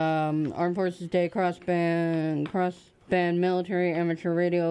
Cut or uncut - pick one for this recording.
cut